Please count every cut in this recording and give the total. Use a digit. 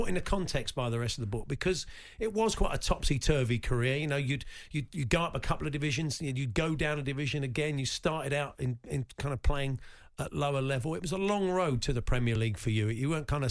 0